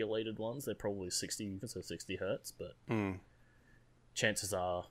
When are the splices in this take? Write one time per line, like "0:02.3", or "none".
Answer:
0:01.6